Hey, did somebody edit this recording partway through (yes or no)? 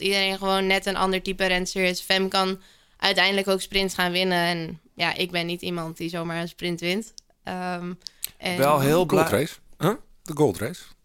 no